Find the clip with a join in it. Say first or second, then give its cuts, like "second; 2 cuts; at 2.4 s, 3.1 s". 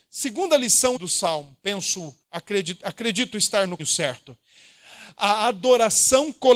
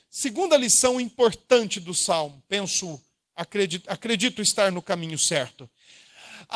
first; 3 cuts; at 1.0 s, 2.2 s, 3.8 s